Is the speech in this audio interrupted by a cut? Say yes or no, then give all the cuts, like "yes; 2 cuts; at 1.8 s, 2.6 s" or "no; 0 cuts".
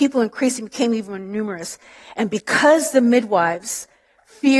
no; 0 cuts